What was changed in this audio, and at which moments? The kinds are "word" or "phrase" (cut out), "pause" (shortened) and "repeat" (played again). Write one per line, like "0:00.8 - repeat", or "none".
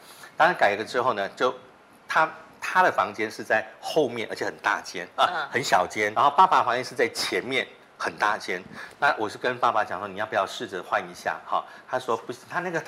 0:06.1 - word